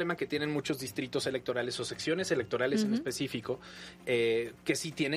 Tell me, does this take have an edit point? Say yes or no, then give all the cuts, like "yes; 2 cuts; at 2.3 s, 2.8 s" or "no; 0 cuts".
no; 0 cuts